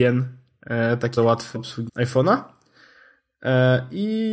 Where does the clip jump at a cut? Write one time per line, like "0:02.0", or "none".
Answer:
0:01.2
0:01.5
0:01.9